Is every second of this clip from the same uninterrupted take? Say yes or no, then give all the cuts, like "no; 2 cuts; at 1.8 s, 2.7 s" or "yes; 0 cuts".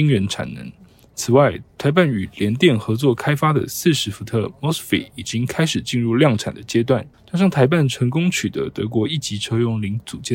no; 1 cut; at 7.1 s